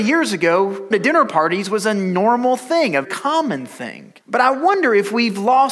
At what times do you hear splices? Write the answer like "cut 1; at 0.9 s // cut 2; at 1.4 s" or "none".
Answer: cut 1; at 0.9 s // cut 2; at 3.0 s // cut 3; at 4.2 s